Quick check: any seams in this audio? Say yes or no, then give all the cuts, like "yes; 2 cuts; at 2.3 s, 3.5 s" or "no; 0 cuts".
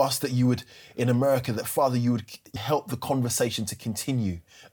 yes; 1 cut; at 2.6 s